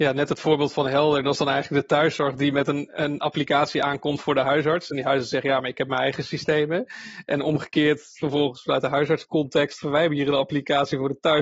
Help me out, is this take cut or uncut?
uncut